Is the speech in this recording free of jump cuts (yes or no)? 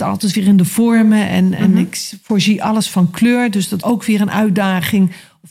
no